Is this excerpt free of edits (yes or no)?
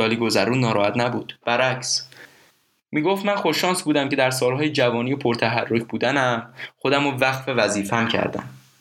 yes